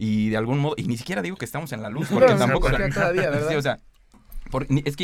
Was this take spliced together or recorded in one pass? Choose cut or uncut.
uncut